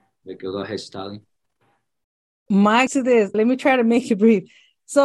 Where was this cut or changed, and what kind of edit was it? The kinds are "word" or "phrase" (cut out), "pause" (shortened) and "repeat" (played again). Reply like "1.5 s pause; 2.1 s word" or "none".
2.9 s phrase; 3.3 s word